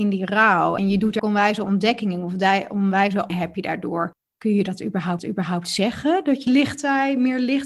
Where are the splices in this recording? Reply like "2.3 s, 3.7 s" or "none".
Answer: 1.2 s, 3.3 s, 4.2 s, 5.2 s, 6.5 s